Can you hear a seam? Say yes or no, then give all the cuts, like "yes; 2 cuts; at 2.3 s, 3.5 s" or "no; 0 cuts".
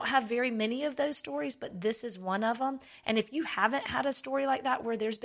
no; 0 cuts